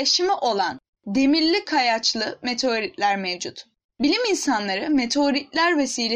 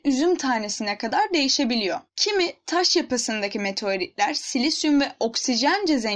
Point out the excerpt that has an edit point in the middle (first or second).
second